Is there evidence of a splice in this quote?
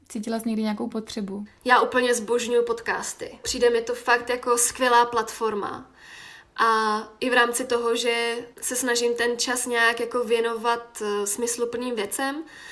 yes; 1 cut; at 8.5 s

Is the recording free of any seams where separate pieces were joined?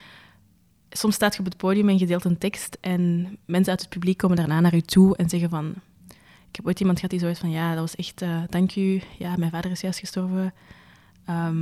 yes; 0 cuts

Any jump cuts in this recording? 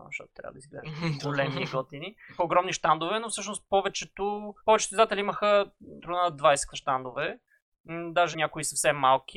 yes; 5 cuts; at 2.4 s, 4.6 s, 6.0 s, 6.7 s, 8.3 s

